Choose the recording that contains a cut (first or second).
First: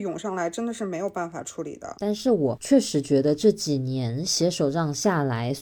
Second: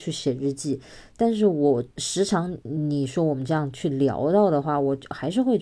second